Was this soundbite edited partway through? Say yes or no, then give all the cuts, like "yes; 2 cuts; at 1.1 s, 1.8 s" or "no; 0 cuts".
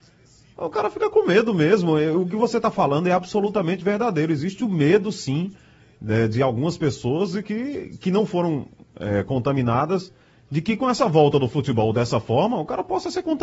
no; 0 cuts